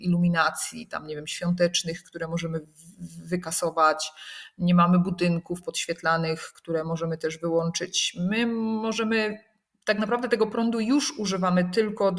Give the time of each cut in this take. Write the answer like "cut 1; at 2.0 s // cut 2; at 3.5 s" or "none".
none